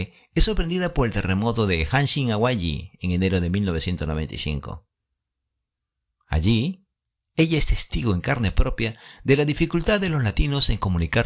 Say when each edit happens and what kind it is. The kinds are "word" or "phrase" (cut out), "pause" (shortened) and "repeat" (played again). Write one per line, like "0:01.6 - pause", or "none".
none